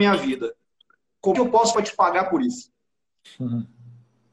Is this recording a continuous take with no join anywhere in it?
no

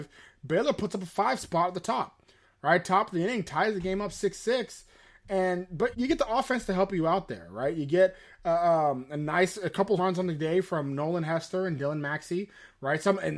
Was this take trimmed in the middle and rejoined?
yes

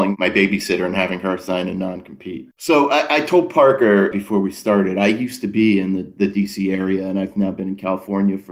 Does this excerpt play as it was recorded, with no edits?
no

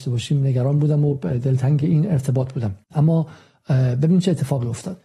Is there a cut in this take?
yes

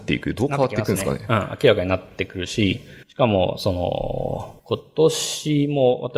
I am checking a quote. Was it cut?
yes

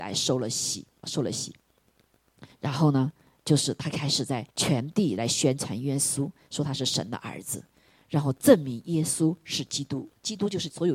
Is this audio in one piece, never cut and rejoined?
no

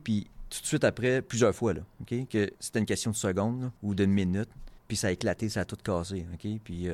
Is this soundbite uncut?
no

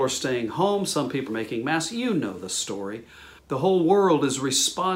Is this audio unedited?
no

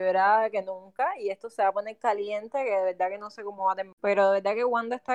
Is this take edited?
no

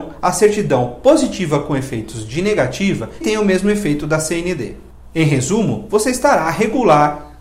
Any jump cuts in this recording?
yes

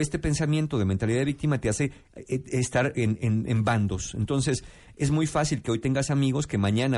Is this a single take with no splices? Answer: yes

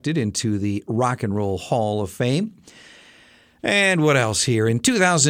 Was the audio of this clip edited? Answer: no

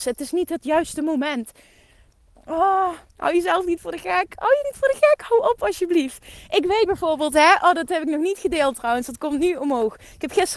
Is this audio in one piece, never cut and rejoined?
no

